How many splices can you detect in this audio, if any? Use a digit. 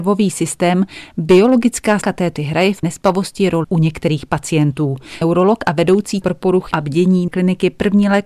8